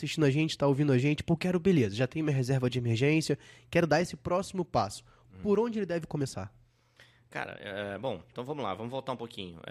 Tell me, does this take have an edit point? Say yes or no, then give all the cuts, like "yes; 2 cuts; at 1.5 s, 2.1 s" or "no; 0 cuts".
no; 0 cuts